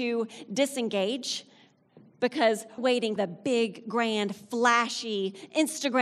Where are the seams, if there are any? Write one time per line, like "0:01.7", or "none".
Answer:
0:02.8
0:03.2